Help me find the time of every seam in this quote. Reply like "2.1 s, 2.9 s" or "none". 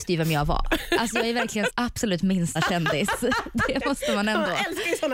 1.7 s, 2.6 s